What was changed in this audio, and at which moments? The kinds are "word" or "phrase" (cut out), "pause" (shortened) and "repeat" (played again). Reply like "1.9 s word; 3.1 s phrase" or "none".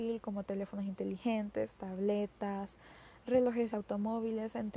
3.7 s word